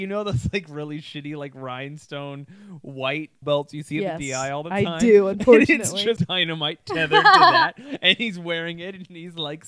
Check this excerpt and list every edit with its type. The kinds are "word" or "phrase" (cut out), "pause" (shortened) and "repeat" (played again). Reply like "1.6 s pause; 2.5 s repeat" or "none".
3.4 s phrase; 6.2 s word

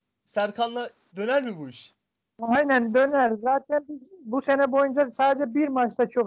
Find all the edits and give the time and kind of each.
none

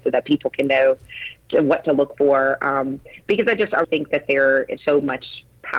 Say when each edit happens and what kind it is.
3.8 s word; 4.8 s word

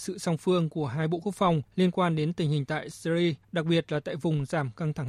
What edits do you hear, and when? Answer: 1.7 s pause; 3.4 s pause

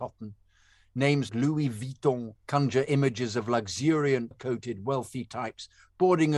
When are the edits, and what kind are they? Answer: 1.3 s word; 2.4 s pause; 4.3 s word

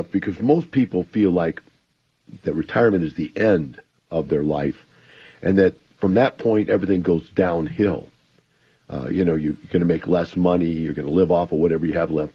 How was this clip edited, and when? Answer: none

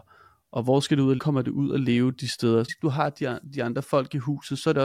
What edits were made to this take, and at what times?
1.2 s phrase; 2.7 s phrase

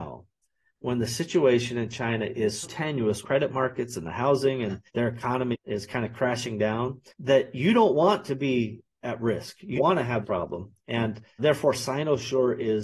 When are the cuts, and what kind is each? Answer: 2.6 s word; 3.2 s word; 4.9 s pause; 5.5 s word; 7.1 s pause; 9.8 s word; 10.2 s word; 11.4 s word

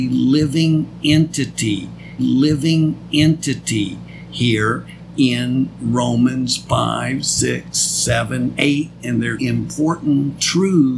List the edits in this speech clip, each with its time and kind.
2.2 s repeat; 8.6 s word; 9.4 s phrase

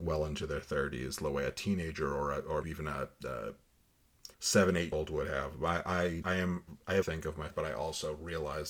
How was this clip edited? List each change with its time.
2.6 s word; 4.3 s pause; 4.9 s word; 6.2 s word; 7.0 s phrase; 7.5 s word

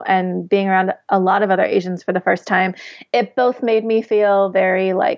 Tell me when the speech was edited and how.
none

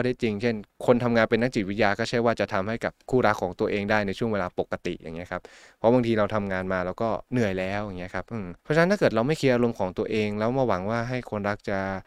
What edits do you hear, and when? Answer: 8.6 s pause

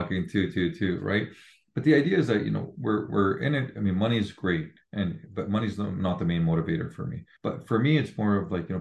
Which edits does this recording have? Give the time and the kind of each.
none

